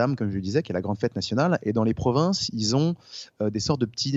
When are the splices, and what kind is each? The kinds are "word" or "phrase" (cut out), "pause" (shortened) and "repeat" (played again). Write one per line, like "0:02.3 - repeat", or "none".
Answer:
none